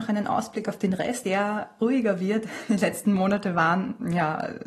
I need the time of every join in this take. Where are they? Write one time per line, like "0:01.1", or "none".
0:01.2
0:01.8